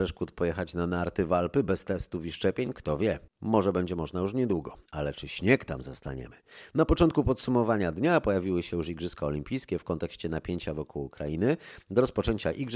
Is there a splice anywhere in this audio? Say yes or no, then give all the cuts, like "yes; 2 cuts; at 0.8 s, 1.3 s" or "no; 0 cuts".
yes; 2 cuts; at 3.3 s, 4.9 s